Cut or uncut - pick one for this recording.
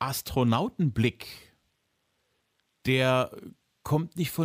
uncut